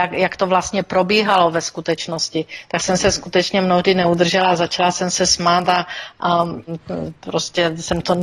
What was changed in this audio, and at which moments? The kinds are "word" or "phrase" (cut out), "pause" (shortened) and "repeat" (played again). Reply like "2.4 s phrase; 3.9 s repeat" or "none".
none